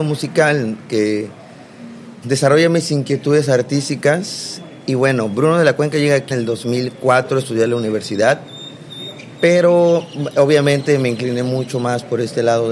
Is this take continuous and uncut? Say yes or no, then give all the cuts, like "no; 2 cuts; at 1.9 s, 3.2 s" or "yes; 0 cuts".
no; 2 cuts; at 2.2 s, 6.3 s